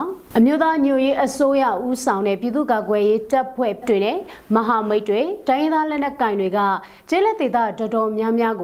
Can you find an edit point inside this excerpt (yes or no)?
yes